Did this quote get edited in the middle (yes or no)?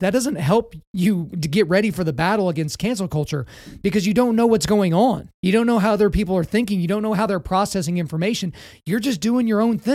yes